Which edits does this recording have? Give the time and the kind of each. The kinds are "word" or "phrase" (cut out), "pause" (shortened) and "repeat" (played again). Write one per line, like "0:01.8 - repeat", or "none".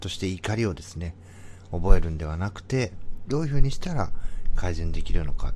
0:03.3 - phrase